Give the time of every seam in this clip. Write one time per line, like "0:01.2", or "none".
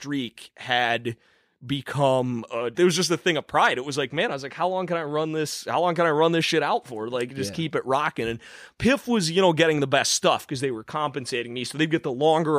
0:02.7